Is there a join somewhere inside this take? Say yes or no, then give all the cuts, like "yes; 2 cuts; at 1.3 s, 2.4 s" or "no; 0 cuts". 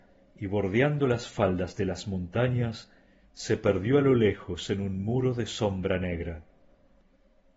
no; 0 cuts